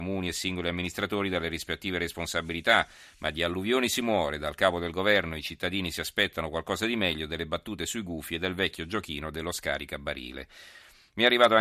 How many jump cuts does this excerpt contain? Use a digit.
0